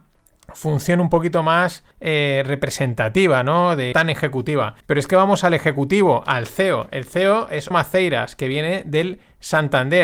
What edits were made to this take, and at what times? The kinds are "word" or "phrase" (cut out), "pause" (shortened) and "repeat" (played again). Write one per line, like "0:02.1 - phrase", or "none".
0:01.9 - pause
0:03.9 - phrase
0:04.8 - pause
0:07.7 - word